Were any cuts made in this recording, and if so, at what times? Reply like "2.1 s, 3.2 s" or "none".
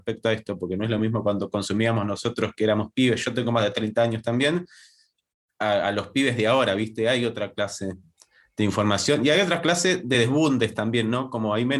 none